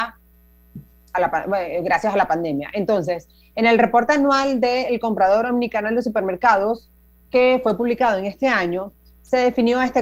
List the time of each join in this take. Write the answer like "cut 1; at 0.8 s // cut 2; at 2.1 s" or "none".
none